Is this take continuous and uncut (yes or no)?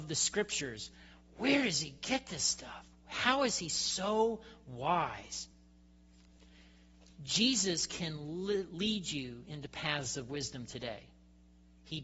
yes